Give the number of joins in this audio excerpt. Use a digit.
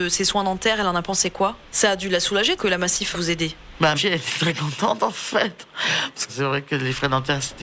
4